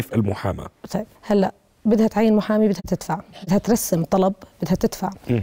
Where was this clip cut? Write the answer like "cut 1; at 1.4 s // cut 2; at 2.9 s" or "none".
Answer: cut 1; at 1.2 s